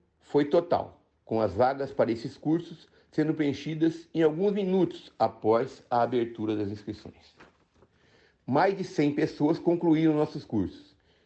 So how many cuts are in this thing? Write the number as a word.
one